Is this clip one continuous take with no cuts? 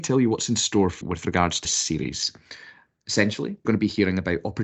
no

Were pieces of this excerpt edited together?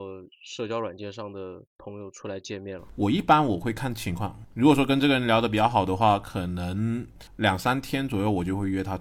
yes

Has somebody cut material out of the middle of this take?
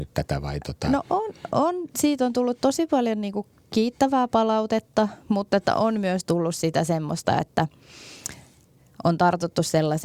no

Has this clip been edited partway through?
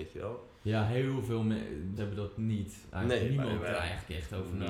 yes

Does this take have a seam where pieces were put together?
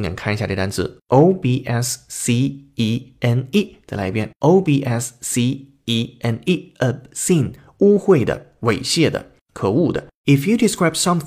no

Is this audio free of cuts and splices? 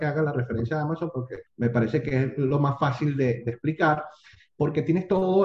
no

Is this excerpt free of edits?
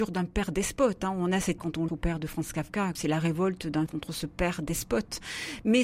no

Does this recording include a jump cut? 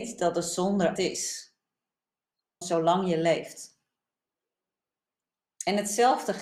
yes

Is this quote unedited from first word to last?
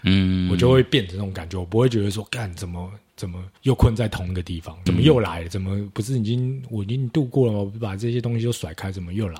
no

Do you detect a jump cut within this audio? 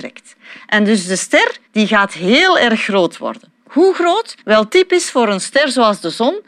yes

